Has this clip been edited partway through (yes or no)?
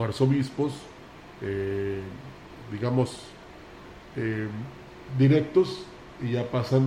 no